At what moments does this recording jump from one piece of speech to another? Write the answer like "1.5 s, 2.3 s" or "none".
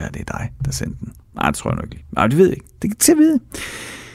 1.2 s